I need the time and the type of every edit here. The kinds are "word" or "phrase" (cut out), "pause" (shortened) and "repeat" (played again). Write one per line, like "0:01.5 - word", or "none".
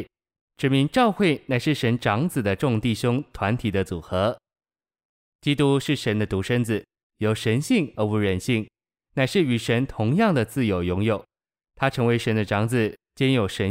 none